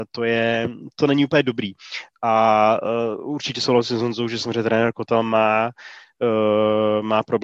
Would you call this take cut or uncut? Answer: uncut